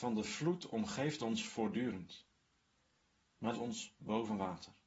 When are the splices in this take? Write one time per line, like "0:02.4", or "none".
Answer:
0:03.5